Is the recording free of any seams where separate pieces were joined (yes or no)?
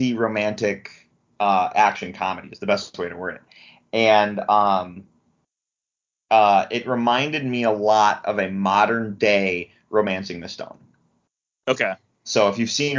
yes